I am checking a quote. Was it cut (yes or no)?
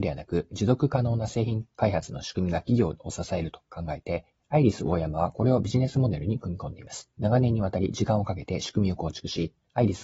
yes